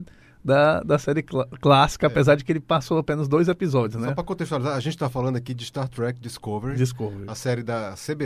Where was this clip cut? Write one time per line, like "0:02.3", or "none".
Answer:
none